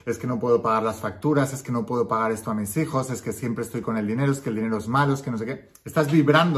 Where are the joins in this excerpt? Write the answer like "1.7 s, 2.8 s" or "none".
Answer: none